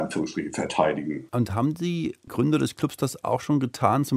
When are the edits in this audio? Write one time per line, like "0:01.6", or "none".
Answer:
0:01.3

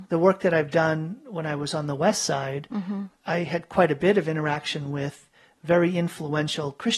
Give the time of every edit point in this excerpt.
none

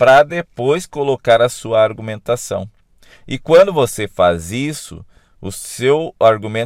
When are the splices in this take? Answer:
none

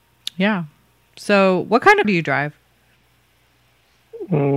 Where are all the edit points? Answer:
0:02.0

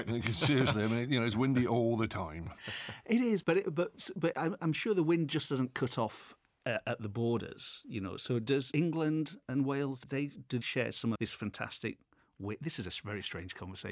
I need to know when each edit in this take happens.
0:03.4
0:04.3
0:08.7
0:10.0
0:10.6
0:11.1

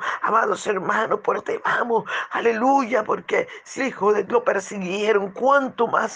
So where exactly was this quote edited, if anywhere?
0:01.3
0:03.8
0:04.2

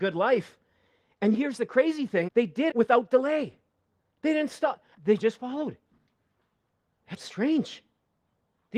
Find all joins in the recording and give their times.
0:01.3
0:02.3
0:02.7
0:05.0
0:07.2

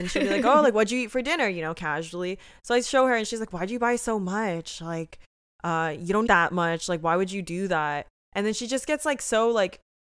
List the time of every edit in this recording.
0:06.3

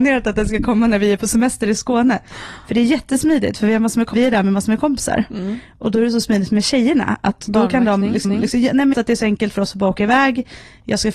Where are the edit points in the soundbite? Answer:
0:04.1
0:08.2
0:08.9

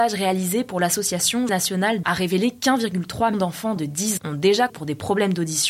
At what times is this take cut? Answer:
0:01.5
0:02.0
0:03.3
0:03.8
0:04.2
0:04.7

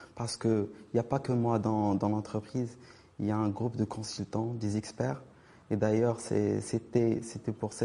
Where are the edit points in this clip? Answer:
none

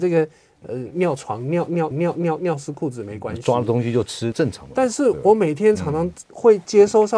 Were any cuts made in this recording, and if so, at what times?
0:01.9
0:04.3
0:06.3

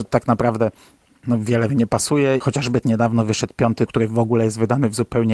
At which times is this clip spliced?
0:01.7
0:02.4
0:02.8
0:03.9

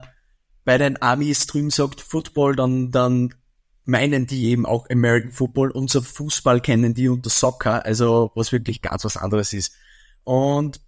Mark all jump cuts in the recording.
none

